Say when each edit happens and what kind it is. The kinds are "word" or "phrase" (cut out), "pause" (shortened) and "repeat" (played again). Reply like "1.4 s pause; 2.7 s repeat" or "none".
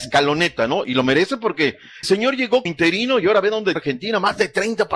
2.0 s word; 2.7 s word; 3.8 s word